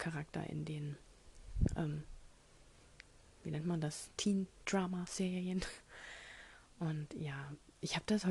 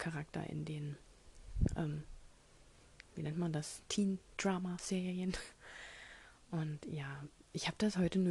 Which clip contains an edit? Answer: second; 1 cut; at 3.1 s

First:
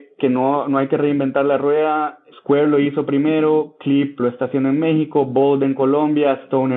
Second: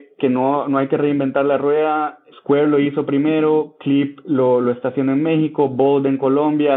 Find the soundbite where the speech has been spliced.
first; 1 cut; at 4.2 s

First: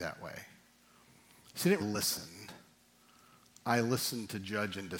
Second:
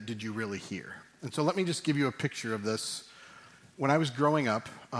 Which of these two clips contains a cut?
first; 1 cut; at 1.8 s

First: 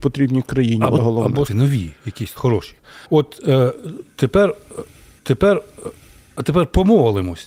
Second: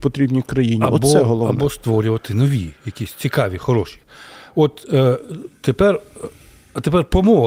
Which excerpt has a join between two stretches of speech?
first; 5 cuts; at 1.0 s, 1.5 s, 2.4 s, 3.0 s, 5.2 s

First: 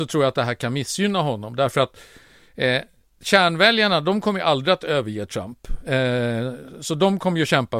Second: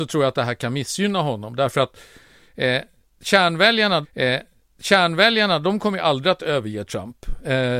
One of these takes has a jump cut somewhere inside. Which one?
second; 1 cut; at 4.0 s

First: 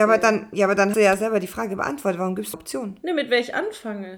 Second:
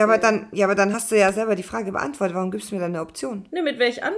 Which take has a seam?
first; 2 cuts; at 0.9 s, 2.5 s

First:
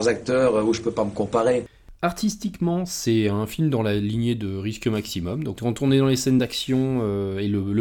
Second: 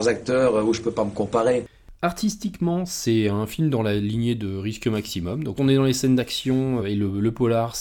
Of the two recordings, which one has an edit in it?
second; 2 cuts; at 5.6 s, 6.8 s

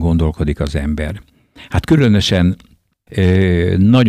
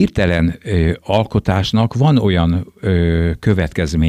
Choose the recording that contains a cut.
first; 1 cut; at 3.1 s

